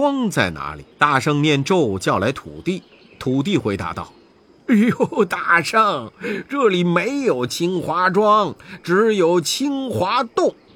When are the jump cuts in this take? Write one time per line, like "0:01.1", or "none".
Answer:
0:00.9

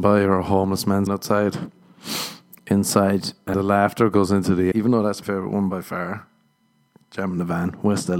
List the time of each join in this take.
0:01.1
0:03.5
0:04.7
0:05.2

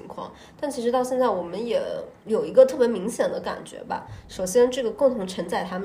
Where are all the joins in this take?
0:02.2

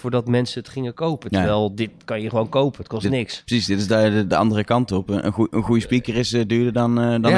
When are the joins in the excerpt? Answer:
none

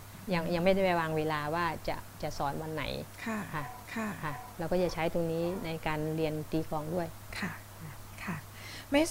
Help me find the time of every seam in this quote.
0:03.8

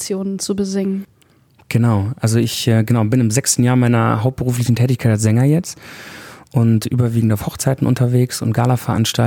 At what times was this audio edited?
none

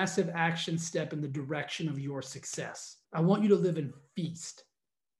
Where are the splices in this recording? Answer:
0:03.0

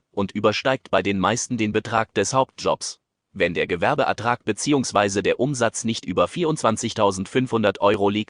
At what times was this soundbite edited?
none

